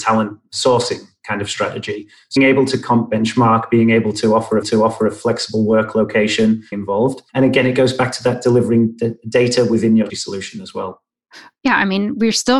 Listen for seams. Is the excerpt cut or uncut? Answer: cut